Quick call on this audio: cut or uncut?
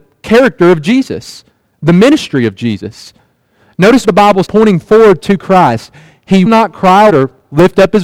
cut